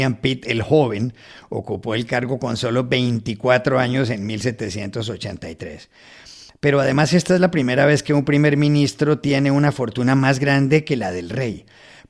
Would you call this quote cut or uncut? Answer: uncut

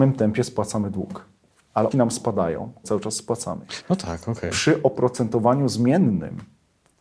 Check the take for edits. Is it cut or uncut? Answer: cut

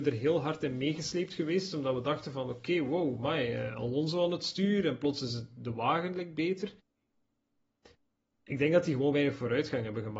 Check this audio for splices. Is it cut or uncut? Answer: uncut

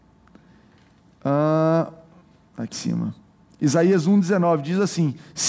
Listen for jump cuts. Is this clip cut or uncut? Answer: cut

